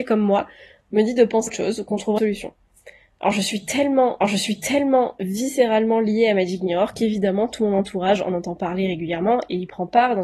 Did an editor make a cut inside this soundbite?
yes; 3 cuts; at 1.5 s, 2.2 s, 4.2 s

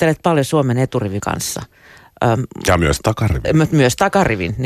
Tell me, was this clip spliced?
yes; 1 cut; at 1.2 s

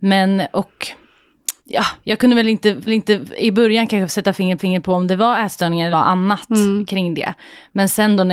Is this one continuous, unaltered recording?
no; 4 cuts; at 1.6 s, 2.9 s, 4.6 s, 5.9 s

